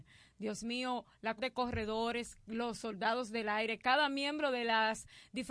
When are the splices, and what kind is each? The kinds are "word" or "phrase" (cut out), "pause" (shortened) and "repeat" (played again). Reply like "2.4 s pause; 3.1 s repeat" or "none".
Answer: 1.4 s word